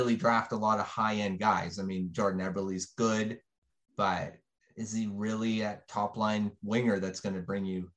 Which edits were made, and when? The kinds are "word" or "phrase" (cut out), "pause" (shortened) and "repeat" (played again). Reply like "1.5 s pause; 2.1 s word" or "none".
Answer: none